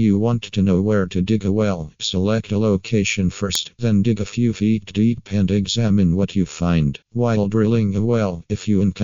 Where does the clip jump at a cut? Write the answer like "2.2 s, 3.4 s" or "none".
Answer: 7.0 s